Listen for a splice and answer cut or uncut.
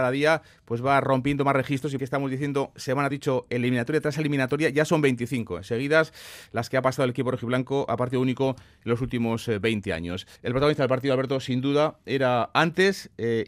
cut